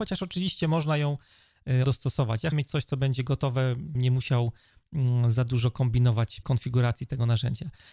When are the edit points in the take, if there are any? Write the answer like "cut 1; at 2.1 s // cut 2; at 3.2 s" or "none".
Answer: cut 1; at 1.8 s // cut 2; at 2.5 s // cut 3; at 3.9 s // cut 4; at 6.4 s